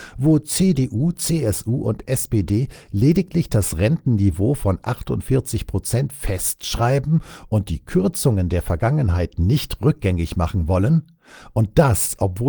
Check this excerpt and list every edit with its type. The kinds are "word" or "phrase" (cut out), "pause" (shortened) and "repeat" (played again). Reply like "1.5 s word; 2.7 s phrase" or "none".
none